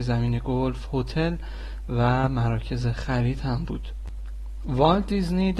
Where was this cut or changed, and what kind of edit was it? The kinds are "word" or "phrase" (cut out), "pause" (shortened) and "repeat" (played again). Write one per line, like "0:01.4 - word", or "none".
none